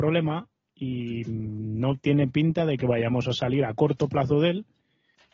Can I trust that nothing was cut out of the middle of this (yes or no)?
yes